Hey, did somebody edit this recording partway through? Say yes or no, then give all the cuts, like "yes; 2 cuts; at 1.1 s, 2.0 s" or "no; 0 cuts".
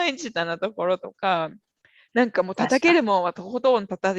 no; 0 cuts